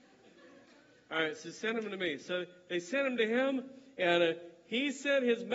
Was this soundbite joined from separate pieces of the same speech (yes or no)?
no